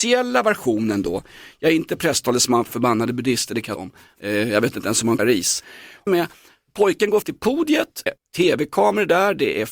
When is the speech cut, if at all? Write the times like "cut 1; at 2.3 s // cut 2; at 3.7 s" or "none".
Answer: cut 1; at 2.7 s // cut 2; at 3.8 s // cut 3; at 5.2 s // cut 4; at 6.1 s // cut 5; at 7.2 s // cut 6; at 8.1 s